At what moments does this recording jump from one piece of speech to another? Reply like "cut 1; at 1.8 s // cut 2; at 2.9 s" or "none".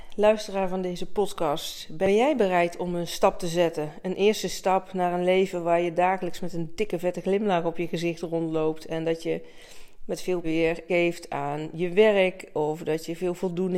cut 1; at 10.4 s // cut 2; at 10.9 s